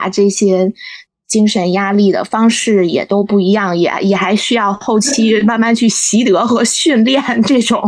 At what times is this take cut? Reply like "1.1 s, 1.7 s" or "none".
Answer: none

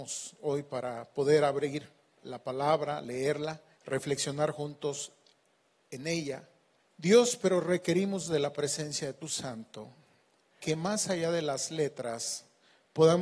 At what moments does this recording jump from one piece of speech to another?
3.7 s, 6.8 s, 9.2 s, 10.6 s

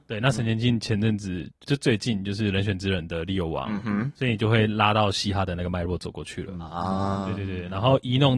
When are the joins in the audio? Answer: 1.6 s

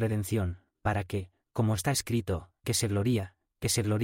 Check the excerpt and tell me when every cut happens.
2.6 s

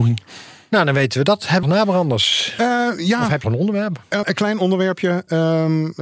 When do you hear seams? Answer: 1.6 s, 3.4 s, 4.2 s

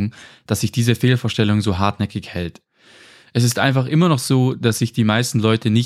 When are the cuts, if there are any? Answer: none

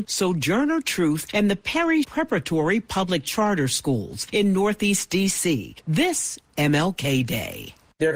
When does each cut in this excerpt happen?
2.0 s

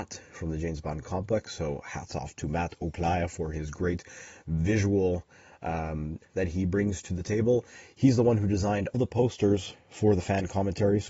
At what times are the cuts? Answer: 6.2 s, 8.9 s

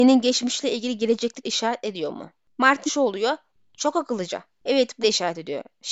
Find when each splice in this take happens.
1.4 s, 2.9 s, 5.0 s

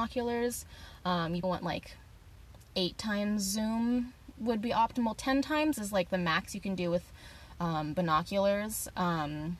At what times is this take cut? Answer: 1.4 s

